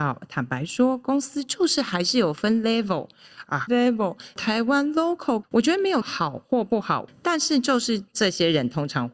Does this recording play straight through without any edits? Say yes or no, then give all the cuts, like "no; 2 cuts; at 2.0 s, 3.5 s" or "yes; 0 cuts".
no; 3 cuts; at 3.7 s, 5.4 s, 6.0 s